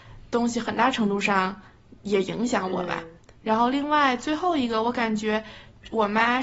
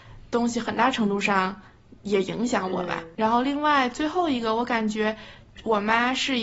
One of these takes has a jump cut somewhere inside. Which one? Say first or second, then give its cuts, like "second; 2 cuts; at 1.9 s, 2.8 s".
second; 1 cut; at 3.1 s